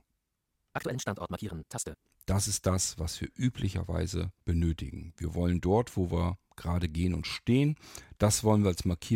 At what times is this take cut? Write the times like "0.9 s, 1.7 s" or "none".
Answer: 4.4 s

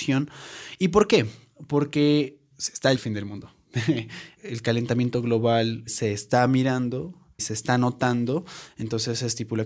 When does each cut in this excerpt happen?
2.5 s, 3.0 s, 4.4 s, 5.9 s, 7.4 s

